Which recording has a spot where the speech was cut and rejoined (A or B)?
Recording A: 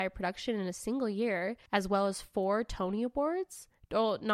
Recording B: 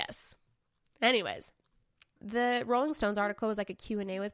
A